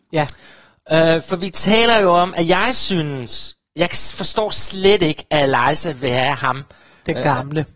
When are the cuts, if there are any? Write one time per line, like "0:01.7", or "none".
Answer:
none